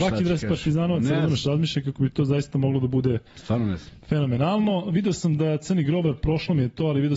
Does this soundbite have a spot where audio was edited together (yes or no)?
yes